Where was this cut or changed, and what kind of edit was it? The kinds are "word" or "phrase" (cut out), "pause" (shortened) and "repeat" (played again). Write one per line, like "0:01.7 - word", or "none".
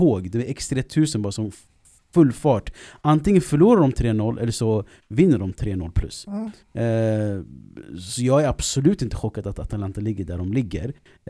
none